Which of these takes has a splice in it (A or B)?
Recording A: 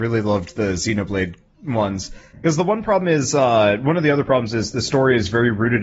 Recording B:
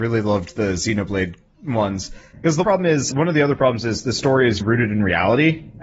B